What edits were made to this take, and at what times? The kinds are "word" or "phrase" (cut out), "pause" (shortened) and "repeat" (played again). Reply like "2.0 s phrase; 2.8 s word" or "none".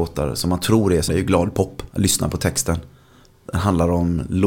1.1 s phrase; 1.9 s pause